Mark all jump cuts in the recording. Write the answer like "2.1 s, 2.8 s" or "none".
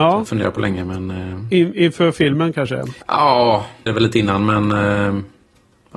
3.0 s, 3.9 s